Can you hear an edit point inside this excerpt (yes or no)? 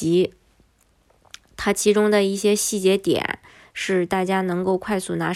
no